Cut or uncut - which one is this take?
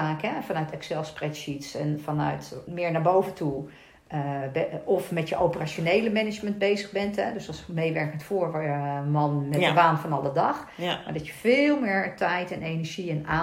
cut